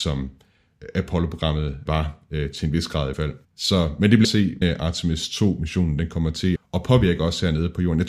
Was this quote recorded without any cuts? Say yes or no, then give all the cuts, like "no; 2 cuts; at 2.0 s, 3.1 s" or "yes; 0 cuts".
no; 6 cuts; at 1.9 s, 3.1 s, 3.4 s, 4.2 s, 4.6 s, 6.6 s